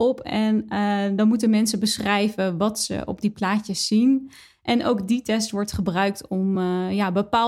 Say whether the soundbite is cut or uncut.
uncut